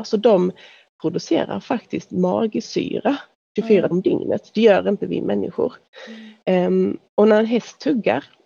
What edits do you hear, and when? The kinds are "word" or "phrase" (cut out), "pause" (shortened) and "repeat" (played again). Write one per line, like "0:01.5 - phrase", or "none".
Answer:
0:03.9 - word